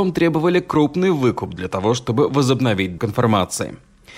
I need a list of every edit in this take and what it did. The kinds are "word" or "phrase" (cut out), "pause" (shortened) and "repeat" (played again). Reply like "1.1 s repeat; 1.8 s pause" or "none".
3.0 s word

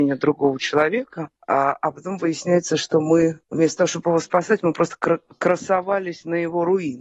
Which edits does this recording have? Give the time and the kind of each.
1.4 s pause; 3.4 s pause

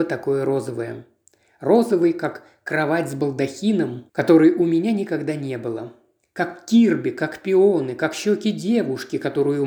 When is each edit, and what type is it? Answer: none

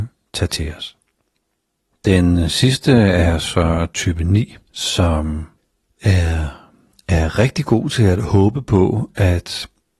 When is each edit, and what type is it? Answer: none

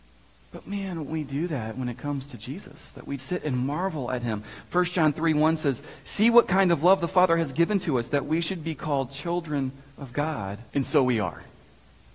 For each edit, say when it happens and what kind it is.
1.1 s phrase; 3.2 s word; 9.9 s pause; 10.7 s pause

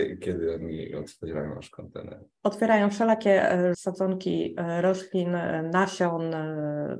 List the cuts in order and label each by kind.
3.7 s word

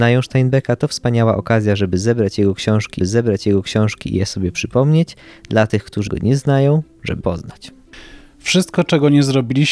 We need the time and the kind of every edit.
3.0 s repeat; 6.1 s word; 7.2 s word

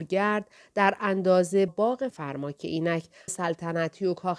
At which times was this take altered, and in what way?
1.7 s word; 2.1 s word; 3.3 s word

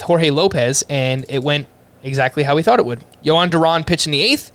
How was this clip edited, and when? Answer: none

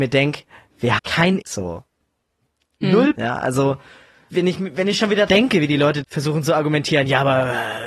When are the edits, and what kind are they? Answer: 1.0 s word; 1.4 s word; 3.1 s word; 4.3 s word; 5.3 s word; 6.0 s word

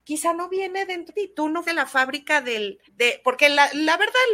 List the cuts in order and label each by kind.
1.1 s word; 1.6 s word; 2.9 s pause

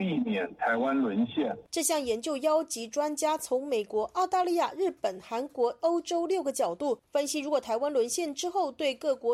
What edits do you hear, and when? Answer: 5.8 s phrase

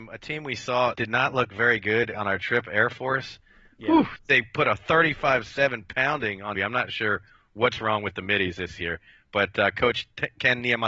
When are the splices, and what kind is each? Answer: 0.9 s word; 6.5 s word

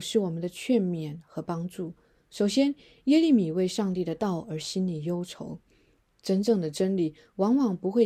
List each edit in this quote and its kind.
none

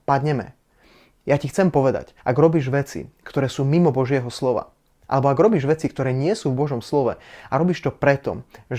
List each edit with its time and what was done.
2.2 s pause

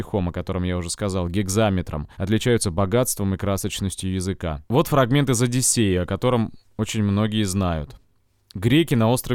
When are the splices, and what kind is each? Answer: 2.1 s pause; 4.7 s pause

